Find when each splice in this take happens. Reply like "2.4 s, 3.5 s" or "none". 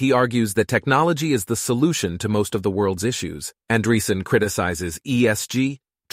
3.6 s